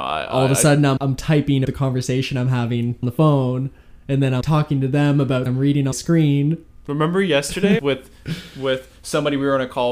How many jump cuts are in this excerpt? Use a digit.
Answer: 7